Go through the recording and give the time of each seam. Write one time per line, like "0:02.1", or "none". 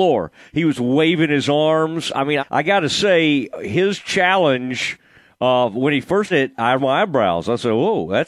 0:02.4
0:06.3
0:06.8